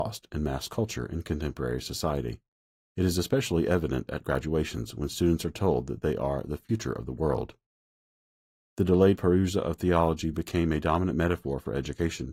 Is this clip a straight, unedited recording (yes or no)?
yes